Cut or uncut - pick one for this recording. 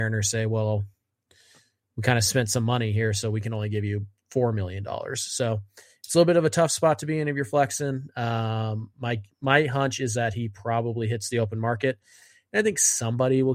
uncut